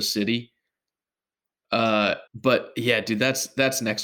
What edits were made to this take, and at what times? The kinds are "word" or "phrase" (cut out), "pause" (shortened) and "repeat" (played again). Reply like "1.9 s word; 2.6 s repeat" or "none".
2.3 s pause